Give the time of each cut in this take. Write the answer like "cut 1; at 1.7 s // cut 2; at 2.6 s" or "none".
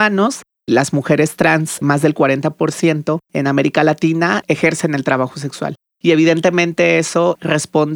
cut 1; at 3.2 s